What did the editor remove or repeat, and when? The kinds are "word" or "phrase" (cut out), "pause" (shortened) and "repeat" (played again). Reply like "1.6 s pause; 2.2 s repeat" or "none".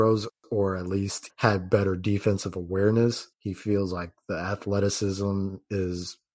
1.3 s word; 3.3 s pause